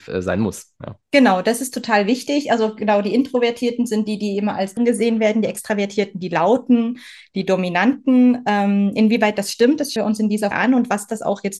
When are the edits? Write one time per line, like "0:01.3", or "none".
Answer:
0:04.8
0:10.0
0:10.5